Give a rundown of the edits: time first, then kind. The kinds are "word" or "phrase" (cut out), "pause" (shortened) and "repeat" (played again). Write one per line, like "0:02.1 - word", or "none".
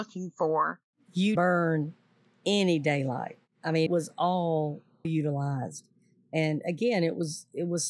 0:01.4 - word
0:03.9 - word
0:05.0 - word